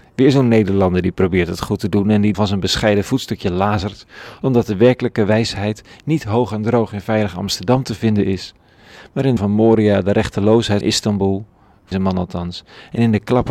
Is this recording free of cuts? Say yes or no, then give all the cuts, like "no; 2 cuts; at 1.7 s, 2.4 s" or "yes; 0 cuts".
no; 4 cuts; at 2.3 s, 9.4 s, 10.8 s, 11.9 s